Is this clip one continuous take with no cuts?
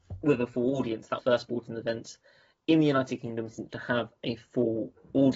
no; 2 cuts; at 1.2 s, 3.7 s

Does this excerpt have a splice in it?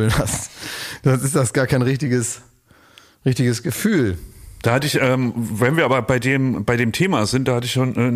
no; 0 cuts

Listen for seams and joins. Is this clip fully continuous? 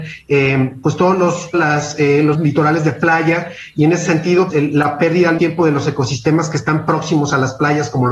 no; 4 cuts; at 1.5 s, 2.3 s, 4.5 s, 5.4 s

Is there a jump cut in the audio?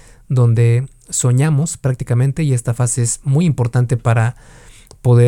no; 0 cuts

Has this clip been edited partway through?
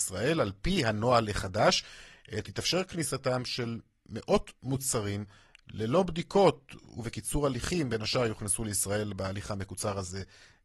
no; 0 cuts

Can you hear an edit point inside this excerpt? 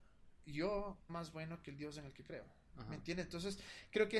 yes; 1 cut; at 1.1 s

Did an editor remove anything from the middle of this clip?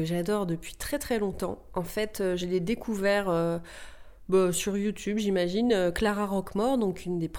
no; 0 cuts

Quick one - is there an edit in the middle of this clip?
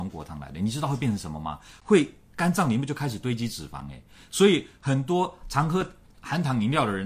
no; 0 cuts

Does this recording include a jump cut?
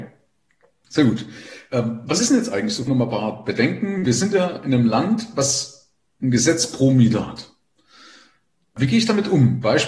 no; 0 cuts

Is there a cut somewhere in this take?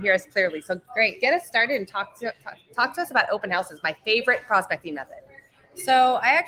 no; 0 cuts

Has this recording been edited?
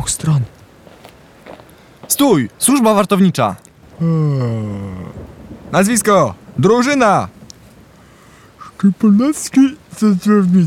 yes; 1 cut; at 3.8 s

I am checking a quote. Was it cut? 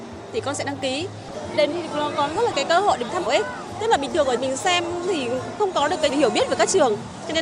yes; 5 cuts; at 1.7 s, 2.5 s, 3.3 s, 4.4 s, 6.1 s

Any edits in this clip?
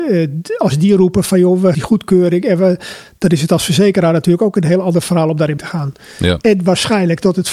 yes; 2 cuts; at 1.7 s, 5.6 s

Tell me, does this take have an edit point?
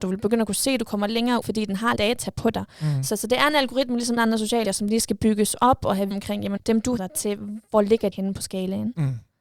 yes; 8 cuts; at 1.4 s, 2.0 s, 4.2 s, 4.6 s, 6.1 s, 6.6 s, 7.0 s, 8.1 s

